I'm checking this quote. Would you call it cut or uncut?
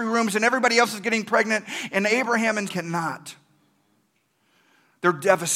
cut